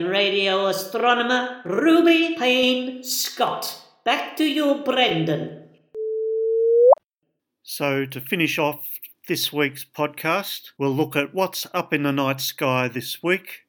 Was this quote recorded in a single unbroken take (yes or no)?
yes